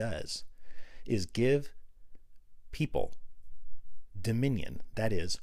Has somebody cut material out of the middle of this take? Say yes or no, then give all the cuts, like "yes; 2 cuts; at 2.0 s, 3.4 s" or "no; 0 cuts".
no; 0 cuts